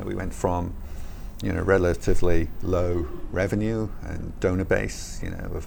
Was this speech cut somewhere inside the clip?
no; 0 cuts

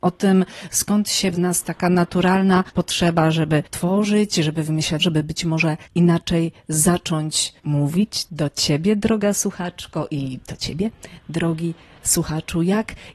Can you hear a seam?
yes; 6 cuts; at 1.3 s, 2.7 s, 3.7 s, 5.0 s, 5.9 s, 7.6 s

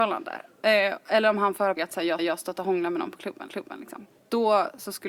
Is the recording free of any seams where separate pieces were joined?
no; 3 cuts; at 1.8 s, 2.2 s, 3.5 s

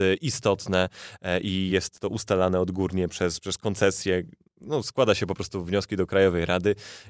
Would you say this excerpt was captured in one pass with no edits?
yes; 0 cuts

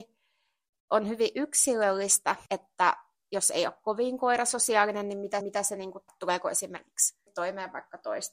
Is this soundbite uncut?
no; 4 cuts; at 2.5 s, 5.4 s, 6.1 s, 7.3 s

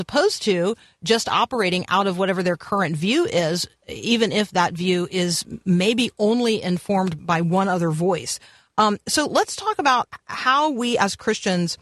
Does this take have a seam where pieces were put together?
yes; 1 cut; at 7.2 s

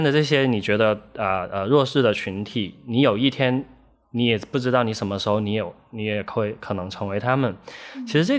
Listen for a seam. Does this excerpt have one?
no; 0 cuts

